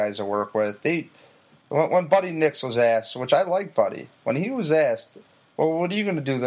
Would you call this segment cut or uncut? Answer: uncut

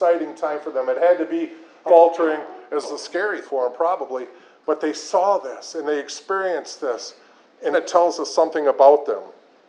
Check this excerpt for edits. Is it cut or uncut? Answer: cut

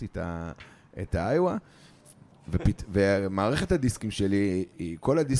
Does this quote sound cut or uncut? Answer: uncut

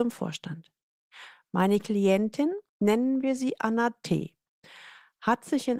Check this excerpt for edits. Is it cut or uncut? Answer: cut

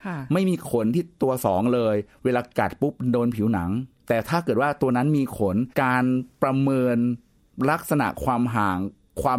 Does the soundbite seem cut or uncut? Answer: cut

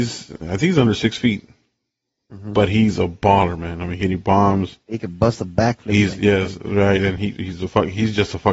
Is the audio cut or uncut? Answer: uncut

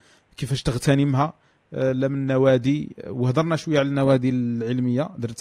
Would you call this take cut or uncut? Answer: uncut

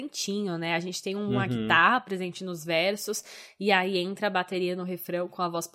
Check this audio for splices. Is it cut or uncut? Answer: uncut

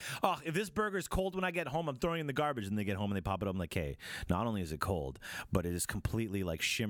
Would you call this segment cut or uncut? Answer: uncut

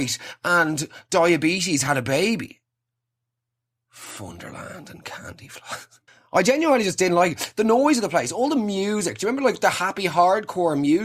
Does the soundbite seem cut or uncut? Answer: cut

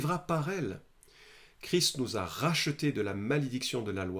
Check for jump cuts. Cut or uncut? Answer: uncut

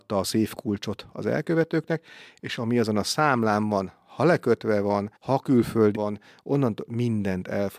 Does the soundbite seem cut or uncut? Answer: cut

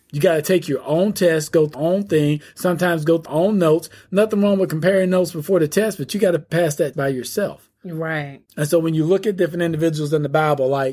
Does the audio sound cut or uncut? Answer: cut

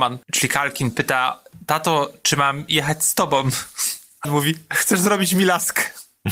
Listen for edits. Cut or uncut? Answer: cut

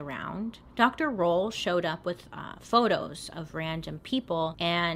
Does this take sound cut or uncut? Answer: uncut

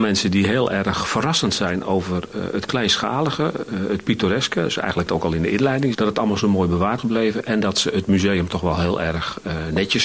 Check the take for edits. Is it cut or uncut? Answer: cut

